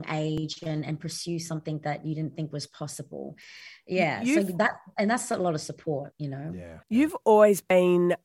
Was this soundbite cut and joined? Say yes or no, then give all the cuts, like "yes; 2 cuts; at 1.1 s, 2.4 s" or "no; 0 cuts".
yes; 1 cut; at 6.8 s